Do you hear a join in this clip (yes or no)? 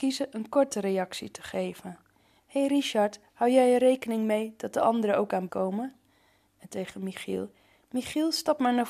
yes